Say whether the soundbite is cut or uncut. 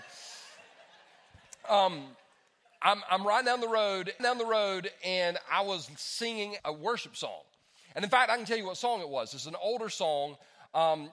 cut